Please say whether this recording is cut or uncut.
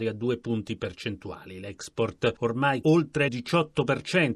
cut